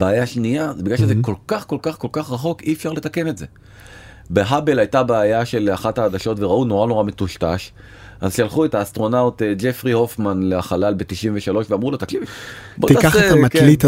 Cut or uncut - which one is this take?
uncut